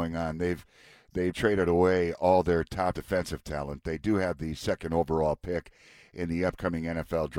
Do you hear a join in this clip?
yes; 2 cuts; at 1.3 s, 2.9 s

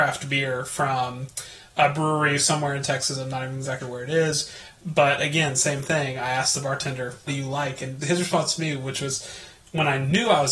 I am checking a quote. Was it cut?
yes; 3 cuts; at 3.8 s, 7.3 s, 8.0 s

